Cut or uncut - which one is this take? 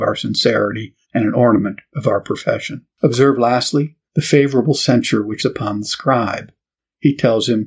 cut